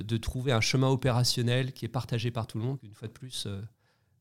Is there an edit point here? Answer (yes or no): yes